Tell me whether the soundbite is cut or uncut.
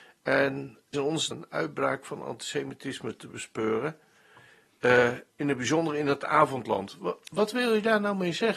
cut